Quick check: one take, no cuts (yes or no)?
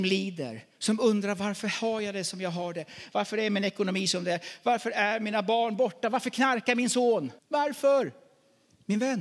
no